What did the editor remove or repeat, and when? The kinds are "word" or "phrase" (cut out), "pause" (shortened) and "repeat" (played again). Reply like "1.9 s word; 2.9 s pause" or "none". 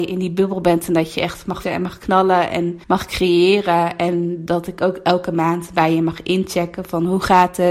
1.6 s word; 2.8 s pause